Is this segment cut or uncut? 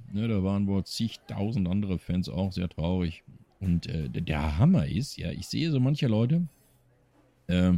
uncut